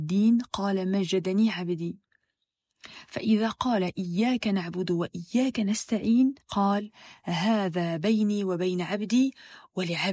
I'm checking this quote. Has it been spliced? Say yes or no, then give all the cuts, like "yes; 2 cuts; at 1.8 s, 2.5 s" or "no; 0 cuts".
yes; 1 cut; at 6.4 s